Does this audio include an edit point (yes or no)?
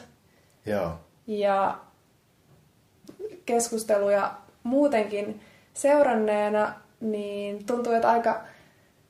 no